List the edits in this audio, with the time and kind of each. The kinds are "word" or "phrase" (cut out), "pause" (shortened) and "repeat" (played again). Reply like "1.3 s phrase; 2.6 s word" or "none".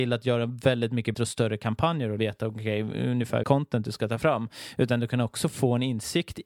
1.1 s word; 2.2 s word; 3.4 s word